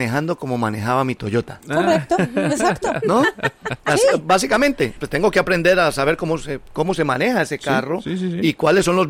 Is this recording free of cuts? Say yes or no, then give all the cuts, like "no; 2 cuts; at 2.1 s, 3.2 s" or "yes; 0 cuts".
no; 1 cut; at 5.0 s